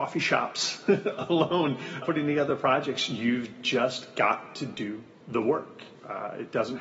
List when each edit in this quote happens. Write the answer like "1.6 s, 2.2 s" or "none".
2.0 s